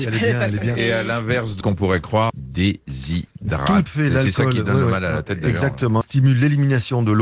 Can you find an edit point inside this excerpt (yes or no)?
yes